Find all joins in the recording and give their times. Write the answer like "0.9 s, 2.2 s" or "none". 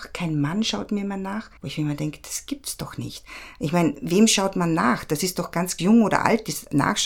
1.6 s, 5.8 s